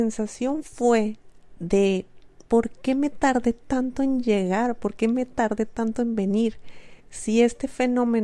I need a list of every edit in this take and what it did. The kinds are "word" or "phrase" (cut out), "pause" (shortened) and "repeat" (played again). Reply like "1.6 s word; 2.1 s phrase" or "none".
2.5 s pause; 7.0 s pause